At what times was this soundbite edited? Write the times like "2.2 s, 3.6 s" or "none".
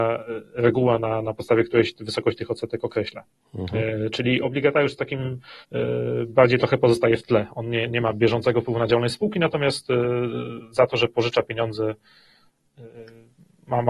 3.3 s, 5.6 s

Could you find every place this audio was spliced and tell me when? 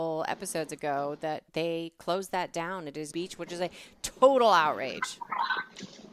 1.5 s, 3.1 s

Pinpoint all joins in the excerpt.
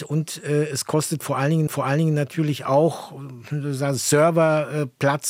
1.7 s

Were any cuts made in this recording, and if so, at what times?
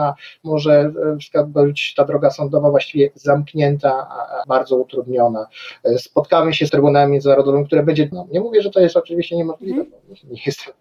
4.4 s, 6.7 s, 8.1 s

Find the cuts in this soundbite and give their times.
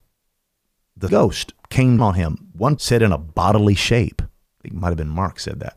1.1 s, 2.0 s, 2.8 s

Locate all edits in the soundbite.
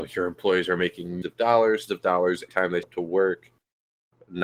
1.2 s, 1.9 s, 2.5 s, 2.8 s

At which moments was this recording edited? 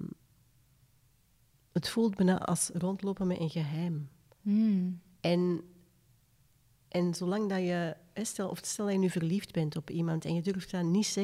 none

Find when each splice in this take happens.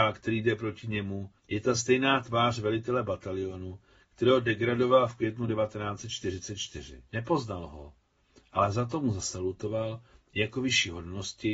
1.4 s, 7.1 s

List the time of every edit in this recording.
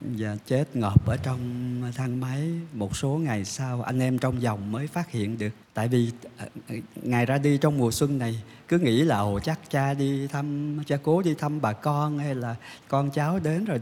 5.6 s

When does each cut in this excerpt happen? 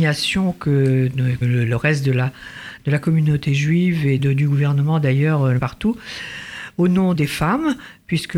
1.4 s, 4.2 s, 5.6 s, 7.1 s

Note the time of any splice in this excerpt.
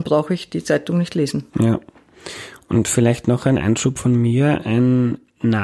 1.5 s

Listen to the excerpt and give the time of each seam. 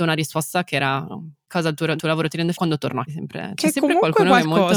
1.5 s, 2.0 s, 2.5 s, 3.1 s

